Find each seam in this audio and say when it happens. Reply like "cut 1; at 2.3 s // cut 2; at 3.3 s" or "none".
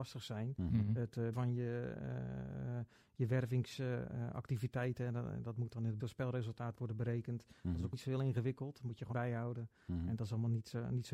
cut 1; at 1.3 s // cut 2; at 6.0 s // cut 3; at 7.9 s // cut 4; at 9.1 s